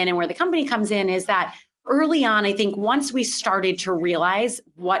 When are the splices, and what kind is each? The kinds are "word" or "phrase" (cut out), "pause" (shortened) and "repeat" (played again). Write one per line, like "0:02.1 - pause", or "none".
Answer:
none